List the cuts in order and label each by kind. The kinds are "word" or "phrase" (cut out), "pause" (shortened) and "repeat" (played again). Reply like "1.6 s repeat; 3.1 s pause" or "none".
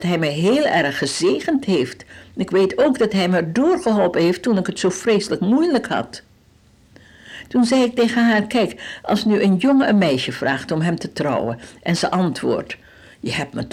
none